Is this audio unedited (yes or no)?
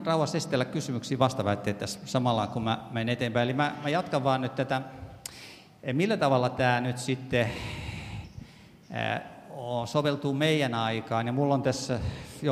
yes